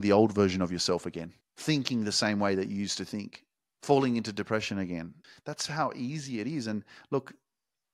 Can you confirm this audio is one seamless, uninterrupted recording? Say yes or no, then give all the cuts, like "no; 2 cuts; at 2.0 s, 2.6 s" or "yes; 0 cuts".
yes; 0 cuts